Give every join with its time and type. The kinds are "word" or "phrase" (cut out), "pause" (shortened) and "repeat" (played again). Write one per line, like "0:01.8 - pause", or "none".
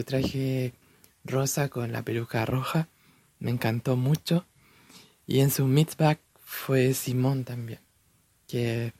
none